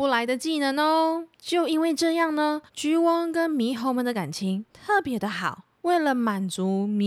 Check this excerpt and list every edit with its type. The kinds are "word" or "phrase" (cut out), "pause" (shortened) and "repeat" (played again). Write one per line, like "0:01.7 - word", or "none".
0:01.3 - pause
0:02.7 - pause
0:05.7 - pause